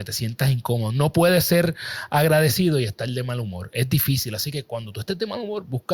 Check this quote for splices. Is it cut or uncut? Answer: uncut